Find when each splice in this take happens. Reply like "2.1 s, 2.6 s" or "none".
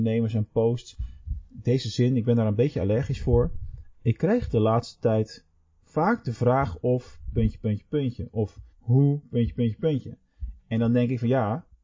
8.7 s